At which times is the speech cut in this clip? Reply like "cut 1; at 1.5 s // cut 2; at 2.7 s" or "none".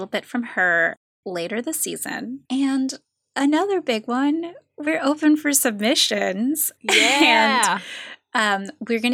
cut 1; at 2.4 s